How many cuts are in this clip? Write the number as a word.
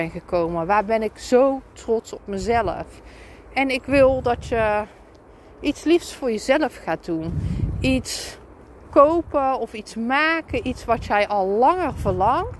zero